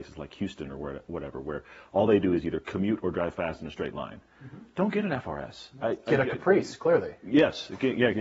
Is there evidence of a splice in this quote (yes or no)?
no